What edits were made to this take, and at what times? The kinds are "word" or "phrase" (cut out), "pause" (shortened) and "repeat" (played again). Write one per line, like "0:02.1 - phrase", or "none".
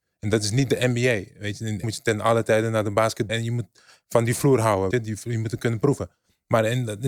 0:01.8 - word
0:03.3 - word
0:04.9 - word